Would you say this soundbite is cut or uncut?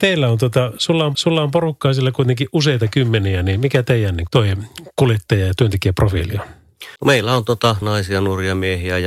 cut